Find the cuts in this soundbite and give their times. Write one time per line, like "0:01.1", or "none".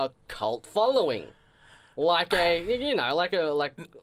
none